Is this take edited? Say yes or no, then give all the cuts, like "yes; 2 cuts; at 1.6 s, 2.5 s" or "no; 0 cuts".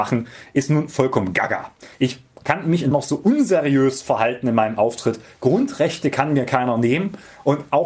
yes; 2 cuts; at 1.9 s, 2.9 s